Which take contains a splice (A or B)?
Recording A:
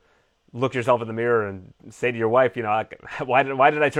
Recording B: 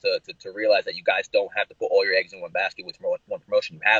A